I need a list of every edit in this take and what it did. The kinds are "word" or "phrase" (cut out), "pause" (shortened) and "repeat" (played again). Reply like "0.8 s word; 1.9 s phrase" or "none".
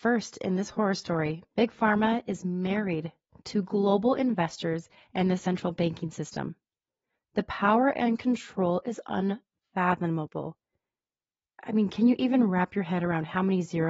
none